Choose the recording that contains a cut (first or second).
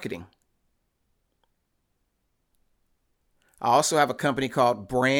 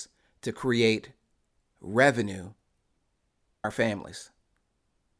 second